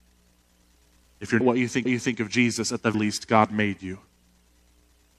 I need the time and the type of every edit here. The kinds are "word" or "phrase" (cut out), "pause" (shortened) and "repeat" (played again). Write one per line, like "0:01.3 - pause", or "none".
0:01.4 - phrase
0:01.9 - repeat
0:02.9 - word